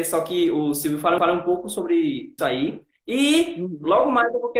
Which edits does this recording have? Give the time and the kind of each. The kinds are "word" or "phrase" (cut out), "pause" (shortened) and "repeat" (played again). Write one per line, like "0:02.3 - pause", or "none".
0:01.2 - repeat
0:02.4 - word

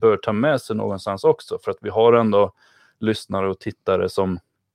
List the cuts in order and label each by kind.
none

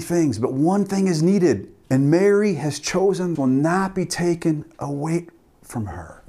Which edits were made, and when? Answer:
0:01.8 - pause
0:03.3 - phrase

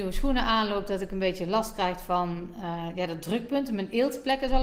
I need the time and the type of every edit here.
none

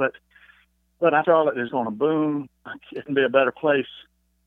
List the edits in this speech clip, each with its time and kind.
0:01.2 - word
0:01.7 - word
0:03.1 - word

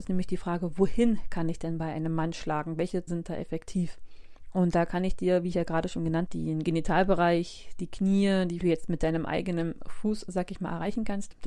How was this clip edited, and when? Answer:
0:03.1 - word
0:06.3 - word
0:08.6 - phrase

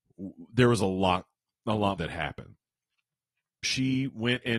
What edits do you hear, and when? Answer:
0:01.3 - pause
0:02.0 - word
0:03.6 - word

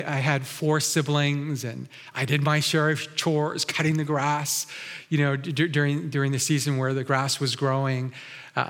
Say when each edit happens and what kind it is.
none

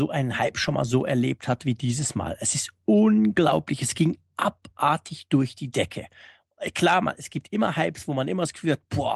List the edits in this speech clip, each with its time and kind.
none

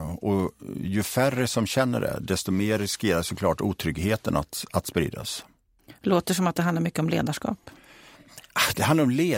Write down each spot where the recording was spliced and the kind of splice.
none

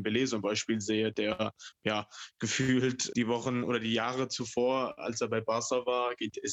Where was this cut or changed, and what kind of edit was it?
0:01.8 - word
0:03.1 - word

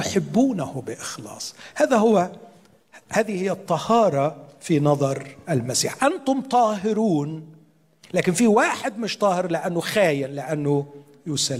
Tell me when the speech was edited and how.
none

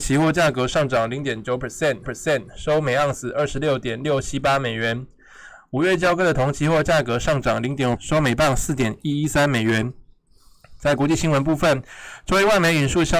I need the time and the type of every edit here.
0:02.0 - repeat
0:08.0 - word

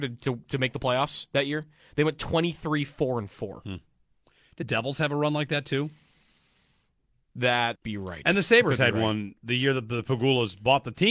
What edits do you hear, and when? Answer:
0:04.6 - word
0:07.8 - word

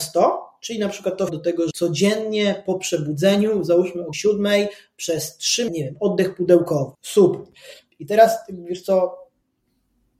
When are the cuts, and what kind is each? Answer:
0:01.3 - phrase
0:01.7 - word
0:04.1 - word
0:05.7 - phrase
0:06.9 - pause

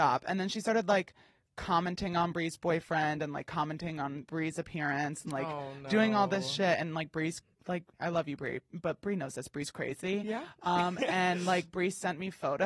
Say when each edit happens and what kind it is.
none

